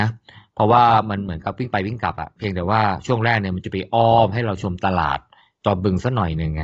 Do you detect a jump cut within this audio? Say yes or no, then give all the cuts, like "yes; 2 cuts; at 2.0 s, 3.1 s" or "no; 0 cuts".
no; 0 cuts